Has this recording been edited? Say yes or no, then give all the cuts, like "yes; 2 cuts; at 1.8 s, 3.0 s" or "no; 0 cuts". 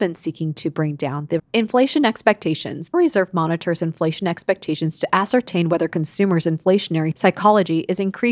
yes; 2 cuts; at 1.4 s, 2.9 s